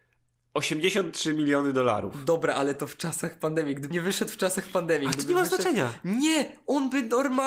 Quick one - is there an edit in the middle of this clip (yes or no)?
yes